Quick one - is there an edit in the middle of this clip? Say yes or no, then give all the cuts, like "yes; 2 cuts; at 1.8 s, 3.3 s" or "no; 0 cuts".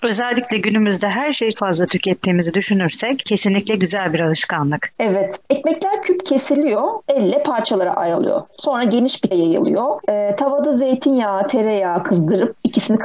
yes; 4 cuts; at 1.5 s, 6.0 s, 7.1 s, 9.3 s